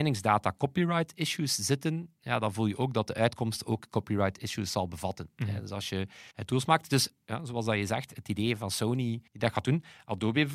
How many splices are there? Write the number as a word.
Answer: two